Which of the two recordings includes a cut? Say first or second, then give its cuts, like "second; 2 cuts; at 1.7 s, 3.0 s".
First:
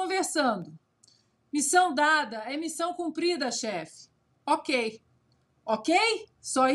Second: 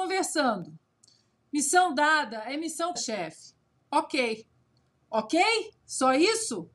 second; 1 cut; at 3.0 s